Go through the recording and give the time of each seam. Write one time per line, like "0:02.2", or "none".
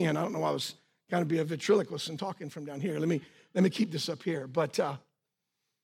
none